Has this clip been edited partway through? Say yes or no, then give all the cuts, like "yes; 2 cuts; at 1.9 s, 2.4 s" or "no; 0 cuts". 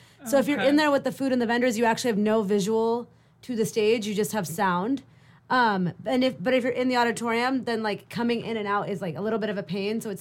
no; 0 cuts